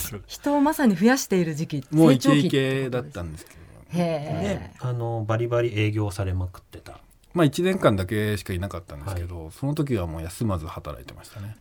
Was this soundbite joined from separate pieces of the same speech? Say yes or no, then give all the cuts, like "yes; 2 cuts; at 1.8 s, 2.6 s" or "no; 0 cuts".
no; 0 cuts